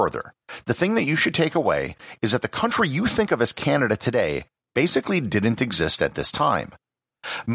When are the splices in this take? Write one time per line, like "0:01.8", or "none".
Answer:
none